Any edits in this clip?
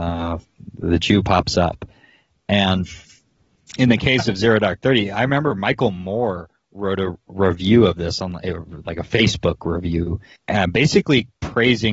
yes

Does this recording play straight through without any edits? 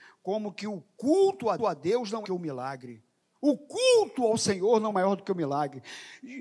no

